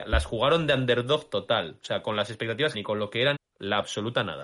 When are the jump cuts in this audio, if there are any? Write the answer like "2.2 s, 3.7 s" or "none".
2.7 s, 3.3 s